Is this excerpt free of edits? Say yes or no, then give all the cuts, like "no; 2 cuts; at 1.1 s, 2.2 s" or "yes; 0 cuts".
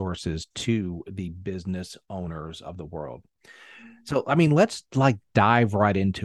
yes; 0 cuts